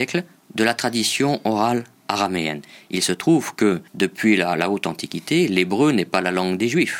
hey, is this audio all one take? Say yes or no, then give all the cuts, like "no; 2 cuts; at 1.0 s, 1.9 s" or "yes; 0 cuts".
no; 1 cut; at 3.9 s